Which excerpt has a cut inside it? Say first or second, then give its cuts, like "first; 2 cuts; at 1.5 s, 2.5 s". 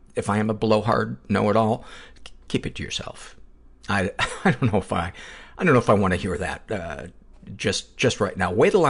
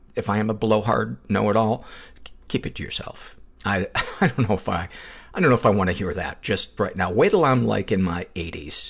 second; 3 cuts; at 3.5 s, 6.4 s, 6.8 s